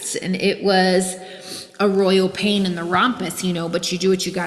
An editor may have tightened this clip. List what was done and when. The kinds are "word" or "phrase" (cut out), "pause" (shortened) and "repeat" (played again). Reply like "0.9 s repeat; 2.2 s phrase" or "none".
1.7 s pause